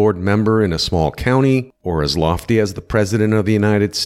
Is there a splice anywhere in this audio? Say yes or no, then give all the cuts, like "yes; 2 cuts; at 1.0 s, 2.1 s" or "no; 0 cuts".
yes; 1 cut; at 1.8 s